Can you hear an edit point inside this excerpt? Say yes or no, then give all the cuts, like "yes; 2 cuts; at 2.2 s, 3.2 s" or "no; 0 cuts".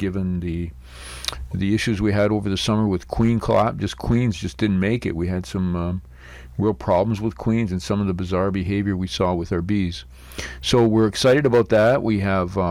no; 0 cuts